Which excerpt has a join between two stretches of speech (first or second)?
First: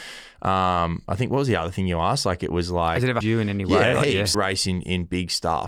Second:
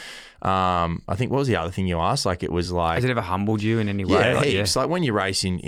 first